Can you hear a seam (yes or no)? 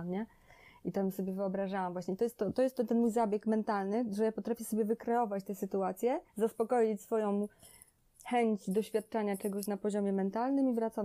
yes